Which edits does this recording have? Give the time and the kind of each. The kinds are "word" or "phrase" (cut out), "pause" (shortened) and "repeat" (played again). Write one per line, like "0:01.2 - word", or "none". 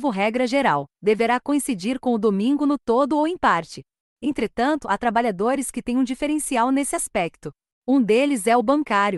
none